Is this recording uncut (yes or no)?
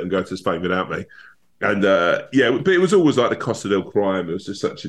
yes